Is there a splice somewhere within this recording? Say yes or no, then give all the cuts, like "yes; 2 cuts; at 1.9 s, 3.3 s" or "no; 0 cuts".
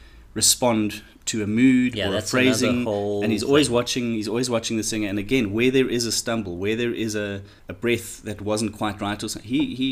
yes; 1 cut; at 7.6 s